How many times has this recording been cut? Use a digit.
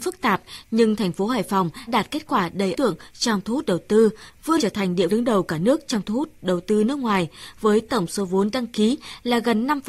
4